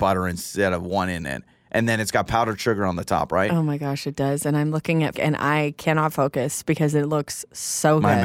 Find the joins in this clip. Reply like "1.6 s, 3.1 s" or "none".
5.1 s